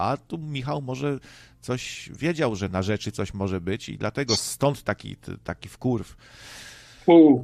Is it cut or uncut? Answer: uncut